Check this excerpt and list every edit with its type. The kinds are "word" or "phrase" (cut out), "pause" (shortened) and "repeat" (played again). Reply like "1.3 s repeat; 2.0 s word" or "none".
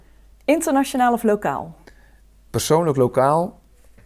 none